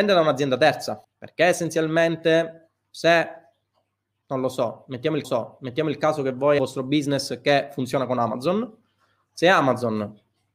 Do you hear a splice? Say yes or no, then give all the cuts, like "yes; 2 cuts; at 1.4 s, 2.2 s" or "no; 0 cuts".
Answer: yes; 3 cuts; at 1.0 s, 5.2 s, 6.6 s